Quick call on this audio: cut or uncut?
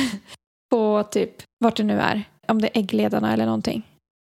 cut